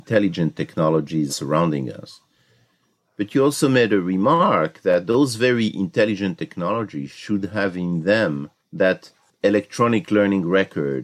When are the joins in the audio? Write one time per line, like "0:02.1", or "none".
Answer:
0:01.3